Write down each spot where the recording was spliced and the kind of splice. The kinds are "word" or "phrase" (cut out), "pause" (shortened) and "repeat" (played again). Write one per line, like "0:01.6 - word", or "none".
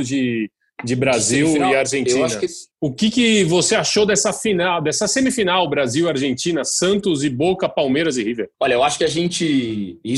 0:02.7 - pause
0:08.5 - pause